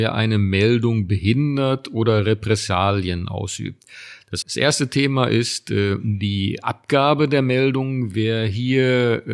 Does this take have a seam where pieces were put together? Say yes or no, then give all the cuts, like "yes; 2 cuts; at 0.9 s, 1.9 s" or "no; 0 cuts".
yes; 1 cut; at 4.4 s